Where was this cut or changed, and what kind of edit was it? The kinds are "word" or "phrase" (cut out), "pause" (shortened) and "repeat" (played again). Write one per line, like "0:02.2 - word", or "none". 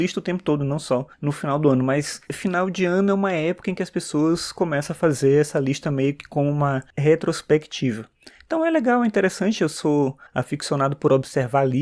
0:01.1 - pause
0:06.9 - pause
0:10.3 - pause